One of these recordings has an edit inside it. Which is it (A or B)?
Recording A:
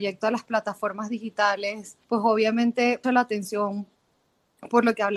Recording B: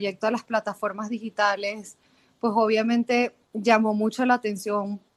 A